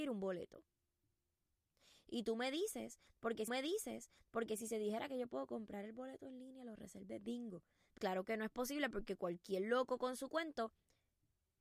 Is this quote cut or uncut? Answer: cut